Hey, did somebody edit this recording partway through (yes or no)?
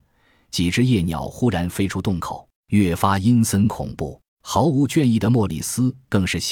yes